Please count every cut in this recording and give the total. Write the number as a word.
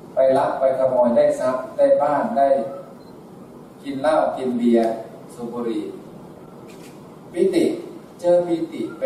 one